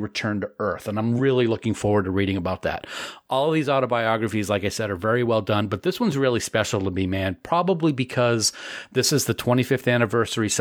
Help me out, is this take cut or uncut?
uncut